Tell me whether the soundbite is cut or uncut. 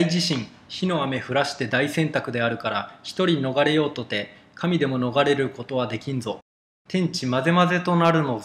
uncut